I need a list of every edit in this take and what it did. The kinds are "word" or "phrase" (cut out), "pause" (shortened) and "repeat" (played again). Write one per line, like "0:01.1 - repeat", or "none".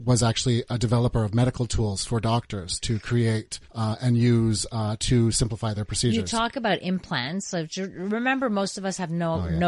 0:03.6 - pause